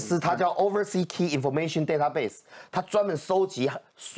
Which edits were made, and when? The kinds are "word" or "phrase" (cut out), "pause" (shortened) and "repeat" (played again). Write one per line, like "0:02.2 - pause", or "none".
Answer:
none